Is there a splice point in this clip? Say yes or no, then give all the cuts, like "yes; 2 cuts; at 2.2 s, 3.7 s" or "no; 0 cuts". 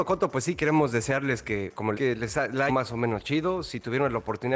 yes; 2 cuts; at 1.9 s, 2.7 s